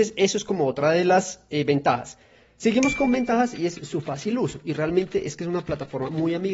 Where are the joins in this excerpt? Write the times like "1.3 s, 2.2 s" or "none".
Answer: none